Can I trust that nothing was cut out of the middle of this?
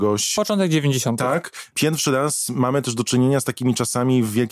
yes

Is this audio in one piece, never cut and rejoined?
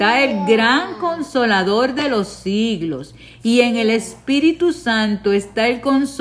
yes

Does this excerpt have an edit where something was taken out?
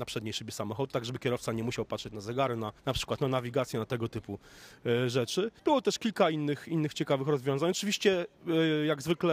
yes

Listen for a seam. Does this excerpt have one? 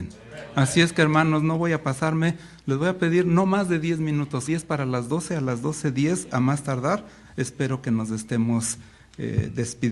yes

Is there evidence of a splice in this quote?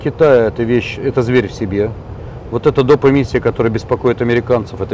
no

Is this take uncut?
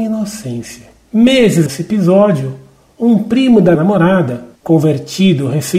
no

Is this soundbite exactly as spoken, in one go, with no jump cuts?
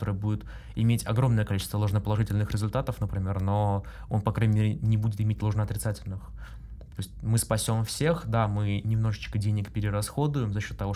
yes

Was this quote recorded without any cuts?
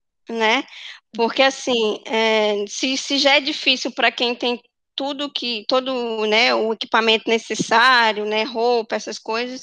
yes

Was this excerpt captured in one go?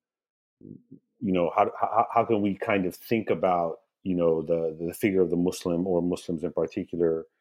yes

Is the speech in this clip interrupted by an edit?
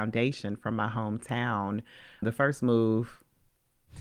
no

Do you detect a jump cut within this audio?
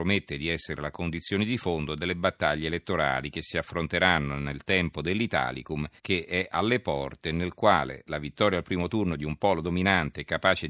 yes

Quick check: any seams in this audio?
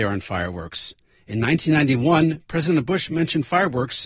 no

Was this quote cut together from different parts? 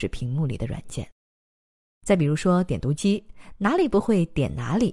no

